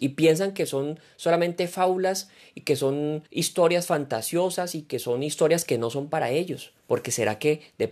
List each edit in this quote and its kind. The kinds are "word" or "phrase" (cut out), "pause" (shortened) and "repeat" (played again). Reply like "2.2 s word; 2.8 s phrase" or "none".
3.3 s pause; 6.8 s pause